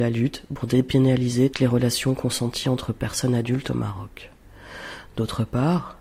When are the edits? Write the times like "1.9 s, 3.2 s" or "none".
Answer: 1.5 s